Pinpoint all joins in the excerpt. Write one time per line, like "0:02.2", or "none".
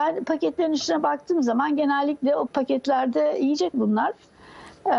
0:02.5
0:03.7